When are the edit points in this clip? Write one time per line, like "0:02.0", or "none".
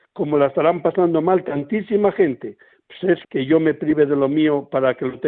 0:03.2